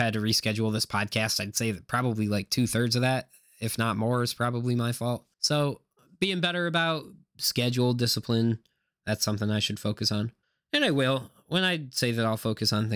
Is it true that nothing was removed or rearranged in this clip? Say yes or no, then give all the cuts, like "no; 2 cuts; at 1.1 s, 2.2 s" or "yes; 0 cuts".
no; 2 cuts; at 5.3 s, 10.4 s